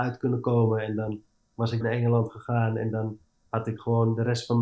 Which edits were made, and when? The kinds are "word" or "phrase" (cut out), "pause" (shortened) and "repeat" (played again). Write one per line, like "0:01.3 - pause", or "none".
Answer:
0:01.8 - word

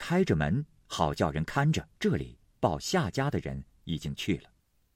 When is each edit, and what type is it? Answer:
0:01.9 - pause

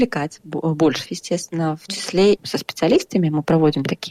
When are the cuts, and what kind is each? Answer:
0:01.0 - word
0:01.9 - word
0:02.4 - phrase

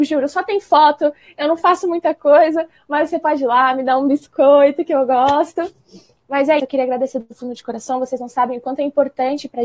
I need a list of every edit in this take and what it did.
0:06.6 - word

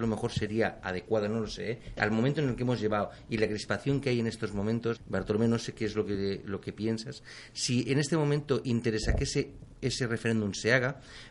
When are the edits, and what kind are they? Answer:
0:05.0 - word

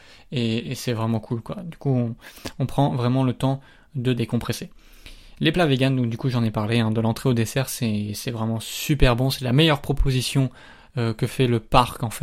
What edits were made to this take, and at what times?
none

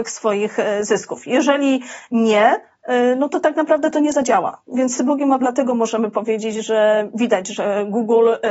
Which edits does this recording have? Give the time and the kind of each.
0:05.0 - word
0:05.4 - word

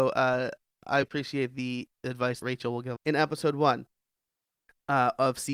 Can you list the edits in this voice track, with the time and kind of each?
0:01.0 - word
0:02.4 - word
0:03.0 - word

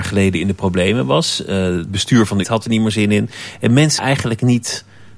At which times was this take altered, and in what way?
0:01.9 - word
0:02.4 - word
0:02.9 - word
0:04.0 - word

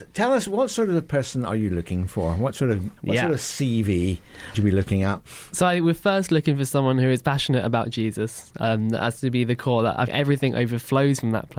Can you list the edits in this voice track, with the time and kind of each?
0:03.0 - pause
0:04.5 - word
0:10.1 - word

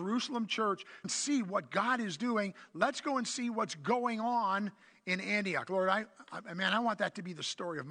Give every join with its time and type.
0:01.0 - phrase

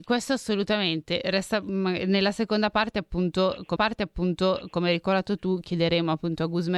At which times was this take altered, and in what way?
0:03.8 - repeat

